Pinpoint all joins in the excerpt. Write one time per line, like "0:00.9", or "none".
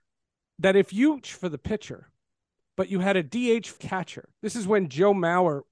0:01.2
0:03.8
0:04.3

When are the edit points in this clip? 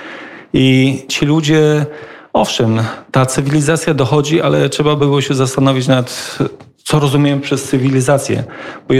none

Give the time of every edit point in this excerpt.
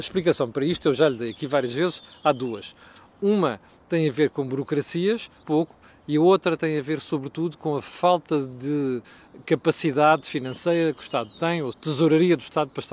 0:05.4
0:11.7

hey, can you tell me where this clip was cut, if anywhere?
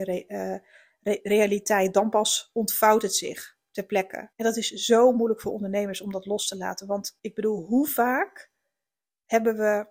0:04.3
0:07.2

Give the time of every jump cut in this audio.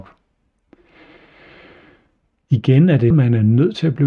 0:03.1

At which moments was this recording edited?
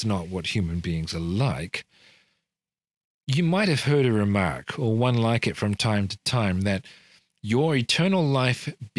none

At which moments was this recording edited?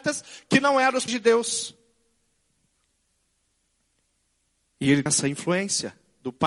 0:01.1
0:05.1

